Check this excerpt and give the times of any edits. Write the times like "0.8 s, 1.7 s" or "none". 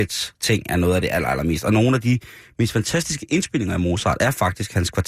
none